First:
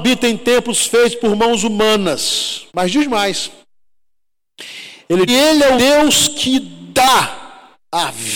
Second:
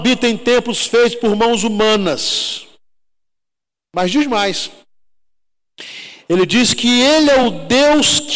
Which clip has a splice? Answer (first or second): first